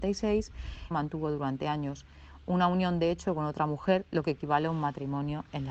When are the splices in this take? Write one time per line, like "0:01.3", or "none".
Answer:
0:00.9